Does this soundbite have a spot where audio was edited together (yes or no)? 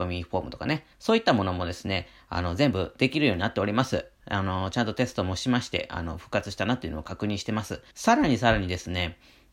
yes